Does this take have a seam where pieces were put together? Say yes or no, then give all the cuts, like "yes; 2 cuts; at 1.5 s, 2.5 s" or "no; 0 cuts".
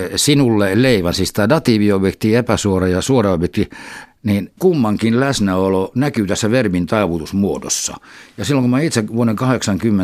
yes; 1 cut; at 4.0 s